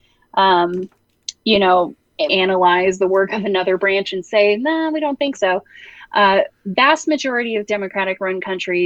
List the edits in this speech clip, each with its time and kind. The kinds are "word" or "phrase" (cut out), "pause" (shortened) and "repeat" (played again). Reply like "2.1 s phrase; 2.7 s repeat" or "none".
2.3 s word